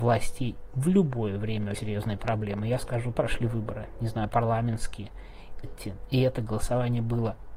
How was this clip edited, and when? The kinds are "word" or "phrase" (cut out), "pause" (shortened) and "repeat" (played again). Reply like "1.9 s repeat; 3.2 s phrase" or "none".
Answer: 1.7 s word; 3.1 s phrase; 4.3 s word; 5.6 s word